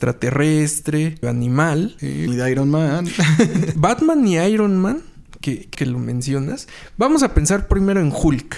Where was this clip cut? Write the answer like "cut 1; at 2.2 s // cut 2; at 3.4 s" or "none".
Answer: cut 1; at 1.2 s // cut 2; at 2.3 s // cut 3; at 5.7 s